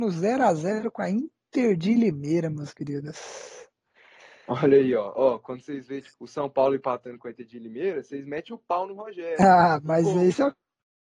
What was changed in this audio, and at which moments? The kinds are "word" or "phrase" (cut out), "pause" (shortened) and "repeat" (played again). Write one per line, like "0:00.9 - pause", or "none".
0:06.1 - word